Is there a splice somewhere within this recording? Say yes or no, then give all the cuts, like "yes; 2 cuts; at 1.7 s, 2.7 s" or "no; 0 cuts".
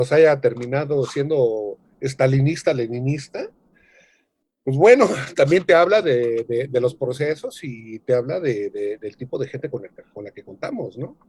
no; 0 cuts